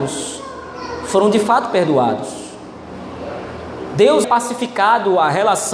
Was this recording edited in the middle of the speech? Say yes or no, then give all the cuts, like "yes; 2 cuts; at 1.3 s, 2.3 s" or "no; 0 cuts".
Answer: yes; 1 cut; at 4.2 s